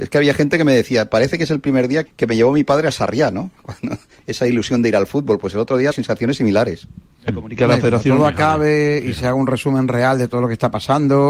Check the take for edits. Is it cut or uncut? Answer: cut